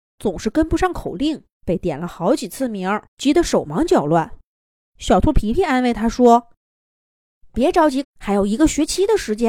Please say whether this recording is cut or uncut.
cut